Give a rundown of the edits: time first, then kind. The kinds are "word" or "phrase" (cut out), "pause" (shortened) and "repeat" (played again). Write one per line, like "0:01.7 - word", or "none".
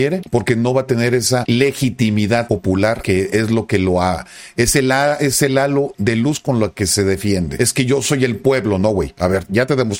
0:05.9 - word

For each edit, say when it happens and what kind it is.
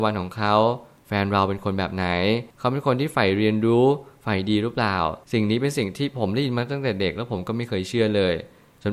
0:02.5 - pause
0:05.2 - pause

